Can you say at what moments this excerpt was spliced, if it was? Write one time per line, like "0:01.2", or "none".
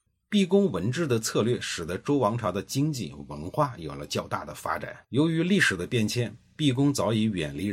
0:05.0